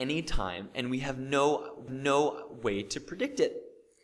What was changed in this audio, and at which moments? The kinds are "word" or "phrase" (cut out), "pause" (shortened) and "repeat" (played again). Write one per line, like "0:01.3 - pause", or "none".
0:01.9 - repeat